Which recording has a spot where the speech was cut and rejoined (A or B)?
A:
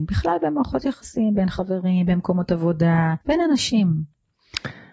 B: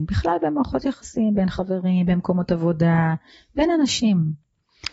A